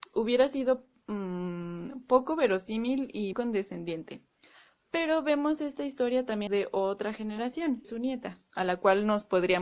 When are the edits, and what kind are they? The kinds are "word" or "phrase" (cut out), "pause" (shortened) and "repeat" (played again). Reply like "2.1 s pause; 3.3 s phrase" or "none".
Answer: 3.3 s word; 6.5 s phrase; 7.8 s phrase